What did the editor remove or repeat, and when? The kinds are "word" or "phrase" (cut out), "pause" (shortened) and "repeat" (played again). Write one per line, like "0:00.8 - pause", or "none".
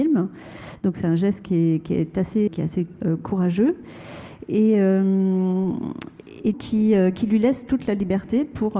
0:02.5 - word
0:06.5 - word

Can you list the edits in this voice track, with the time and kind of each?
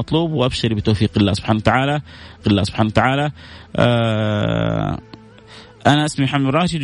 0:02.4 - repeat

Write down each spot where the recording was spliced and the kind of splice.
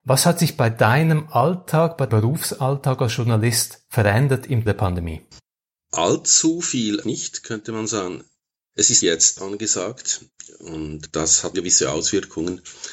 0:02.1 - word
0:04.7 - word
0:07.0 - word
0:09.0 - word
0:09.4 - word
0:11.5 - word

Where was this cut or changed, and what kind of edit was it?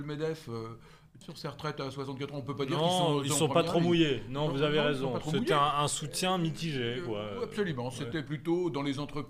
0:01.2 - phrase

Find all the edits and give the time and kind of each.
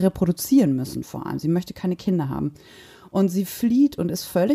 none

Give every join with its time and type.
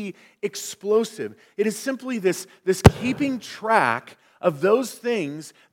none

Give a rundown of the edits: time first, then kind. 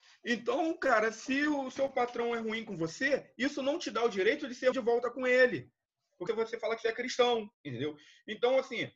0:04.7 - word
0:06.3 - word
0:07.5 - pause

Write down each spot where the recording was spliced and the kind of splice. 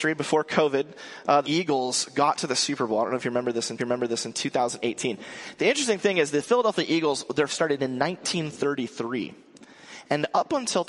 0:01.4 - phrase
0:03.8 - repeat
0:07.5 - word

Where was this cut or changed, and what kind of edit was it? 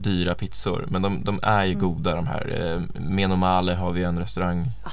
none

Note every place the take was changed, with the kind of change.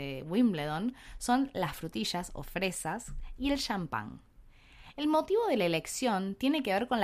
none

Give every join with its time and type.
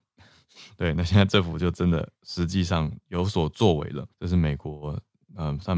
0:04.1 - pause

